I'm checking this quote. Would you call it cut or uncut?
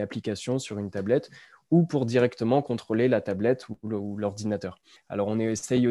uncut